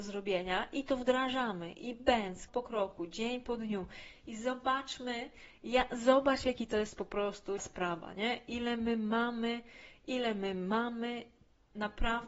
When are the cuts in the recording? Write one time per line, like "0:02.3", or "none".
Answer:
0:02.5
0:07.6

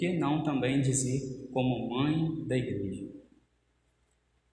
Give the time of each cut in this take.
none

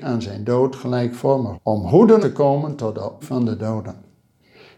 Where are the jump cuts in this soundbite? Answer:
0:01.5
0:02.2
0:03.2

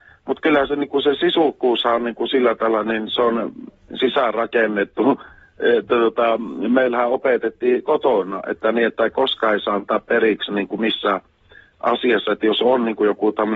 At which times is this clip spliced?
none

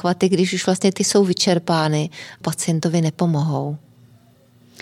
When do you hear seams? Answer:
0:01.0
0:02.4

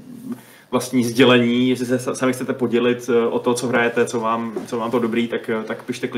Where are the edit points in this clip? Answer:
0:04.9

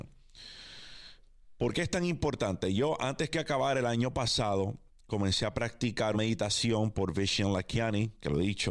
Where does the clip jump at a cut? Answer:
0:04.9
0:06.1

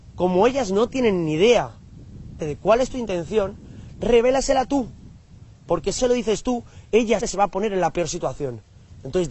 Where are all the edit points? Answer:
0:02.4
0:06.0
0:07.2

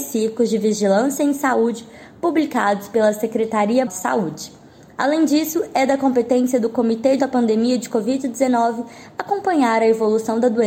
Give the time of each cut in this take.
0:03.9
0:07.2

